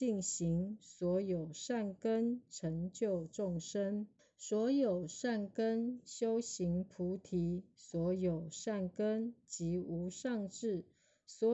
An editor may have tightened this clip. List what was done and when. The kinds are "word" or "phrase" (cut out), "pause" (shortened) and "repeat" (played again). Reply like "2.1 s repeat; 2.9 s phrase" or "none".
4.2 s pause

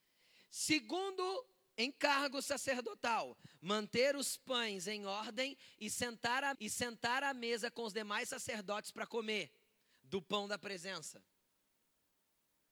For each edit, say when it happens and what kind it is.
6.5 s repeat

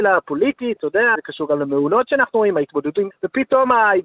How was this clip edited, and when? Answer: 1.1 s word; 3.1 s word

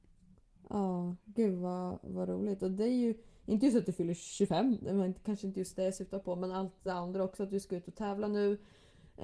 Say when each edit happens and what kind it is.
none

